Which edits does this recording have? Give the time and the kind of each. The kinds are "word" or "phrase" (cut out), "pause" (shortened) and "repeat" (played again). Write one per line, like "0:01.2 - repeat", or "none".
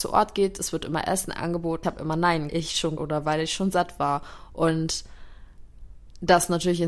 0:01.8 - phrase
0:02.5 - phrase
0:03.0 - phrase